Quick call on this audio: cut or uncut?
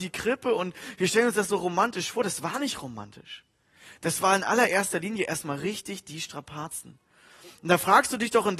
uncut